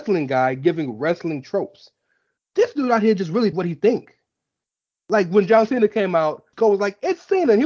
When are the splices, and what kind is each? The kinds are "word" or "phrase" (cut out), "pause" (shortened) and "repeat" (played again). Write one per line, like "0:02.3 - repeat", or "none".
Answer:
0:03.5 - word
0:06.5 - word